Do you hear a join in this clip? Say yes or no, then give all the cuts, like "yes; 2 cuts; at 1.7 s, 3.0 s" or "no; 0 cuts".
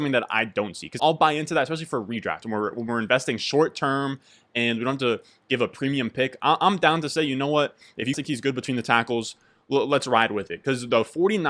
yes; 2 cuts; at 1.0 s, 8.1 s